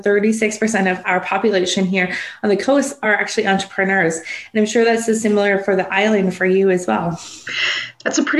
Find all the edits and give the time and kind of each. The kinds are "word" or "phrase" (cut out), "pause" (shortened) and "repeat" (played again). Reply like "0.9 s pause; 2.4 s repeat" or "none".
none